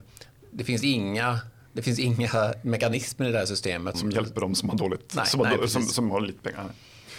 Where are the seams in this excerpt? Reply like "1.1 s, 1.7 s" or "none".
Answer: 3.9 s

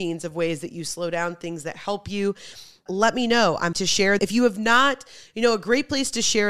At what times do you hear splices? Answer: 2.9 s, 3.7 s, 4.2 s

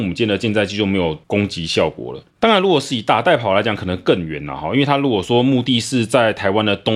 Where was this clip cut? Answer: 1.2 s, 2.3 s

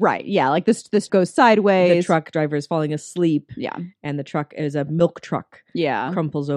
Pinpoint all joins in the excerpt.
1.1 s

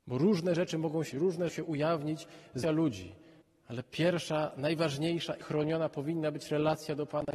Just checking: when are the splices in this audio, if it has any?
1.1 s, 1.5 s, 2.6 s, 3.4 s, 5.4 s

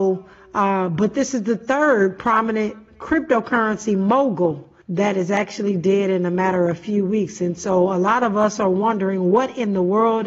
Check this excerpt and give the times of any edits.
4.8 s

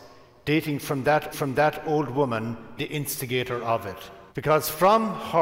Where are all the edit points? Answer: 1.3 s, 2.8 s, 4.3 s

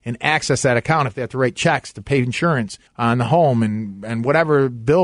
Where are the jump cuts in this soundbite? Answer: 2.9 s

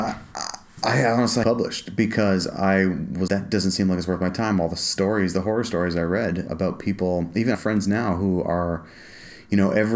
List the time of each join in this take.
1.4 s, 3.3 s, 6.5 s, 7.5 s

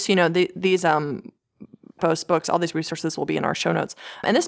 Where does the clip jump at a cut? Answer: 2.0 s

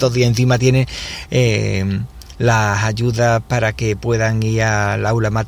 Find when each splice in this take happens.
none

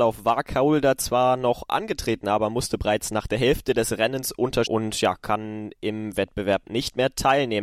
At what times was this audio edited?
4.6 s

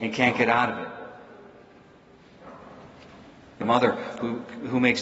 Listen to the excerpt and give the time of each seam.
3.6 s

